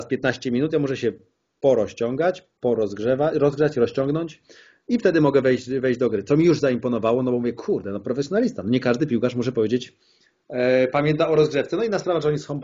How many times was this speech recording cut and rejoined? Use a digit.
0